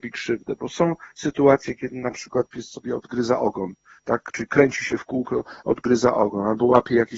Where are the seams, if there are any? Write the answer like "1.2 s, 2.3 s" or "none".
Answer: none